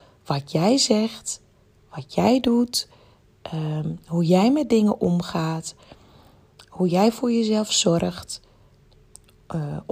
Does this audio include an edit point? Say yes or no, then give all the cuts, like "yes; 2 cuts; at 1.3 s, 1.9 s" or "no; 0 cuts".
no; 0 cuts